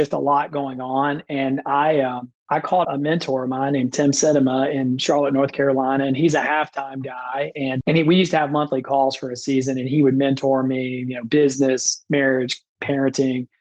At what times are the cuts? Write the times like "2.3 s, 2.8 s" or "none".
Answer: 2.4 s, 2.8 s, 7.8 s